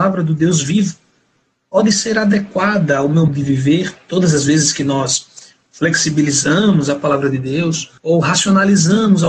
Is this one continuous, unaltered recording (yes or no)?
no